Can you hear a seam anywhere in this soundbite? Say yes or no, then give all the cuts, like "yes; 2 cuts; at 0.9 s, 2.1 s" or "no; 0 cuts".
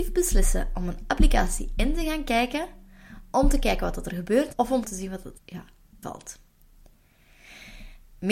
yes; 4 cuts; at 4.5 s, 4.8 s, 5.4 s, 6.0 s